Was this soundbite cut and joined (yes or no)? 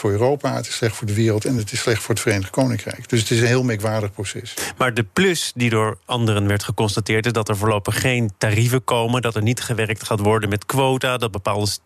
no